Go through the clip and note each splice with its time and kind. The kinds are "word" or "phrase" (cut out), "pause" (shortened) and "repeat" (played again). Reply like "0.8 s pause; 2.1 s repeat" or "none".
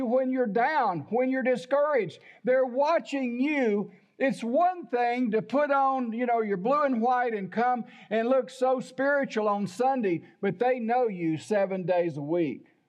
none